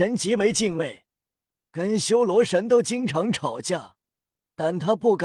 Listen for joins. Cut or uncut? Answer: uncut